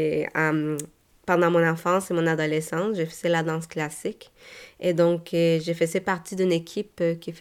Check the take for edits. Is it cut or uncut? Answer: uncut